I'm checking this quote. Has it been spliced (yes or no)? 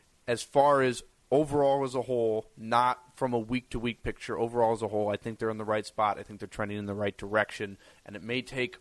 no